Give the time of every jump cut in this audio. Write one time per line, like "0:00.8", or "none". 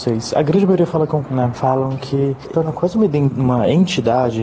0:01.2
0:02.5